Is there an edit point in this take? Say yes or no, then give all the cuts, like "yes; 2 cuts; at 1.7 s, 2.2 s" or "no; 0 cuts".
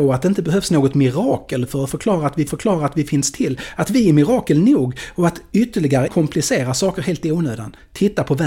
yes; 2 cuts; at 2.5 s, 6.1 s